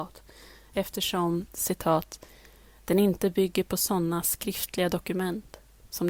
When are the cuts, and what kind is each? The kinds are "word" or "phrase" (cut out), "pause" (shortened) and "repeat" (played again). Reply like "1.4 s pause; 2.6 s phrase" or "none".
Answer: none